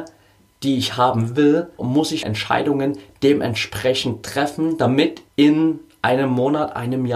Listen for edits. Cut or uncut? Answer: cut